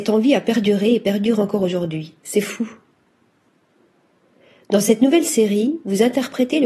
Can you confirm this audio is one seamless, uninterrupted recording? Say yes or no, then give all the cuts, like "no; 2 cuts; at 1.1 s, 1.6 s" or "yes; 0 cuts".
yes; 0 cuts